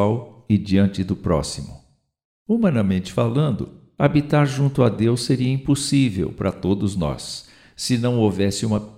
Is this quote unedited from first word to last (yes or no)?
yes